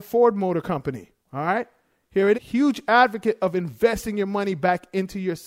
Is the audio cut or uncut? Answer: cut